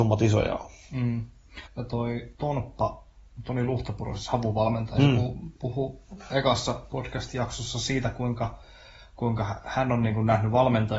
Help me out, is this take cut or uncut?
cut